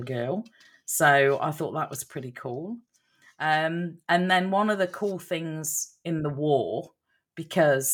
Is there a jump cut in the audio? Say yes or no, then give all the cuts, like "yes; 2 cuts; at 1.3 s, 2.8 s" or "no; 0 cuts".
no; 0 cuts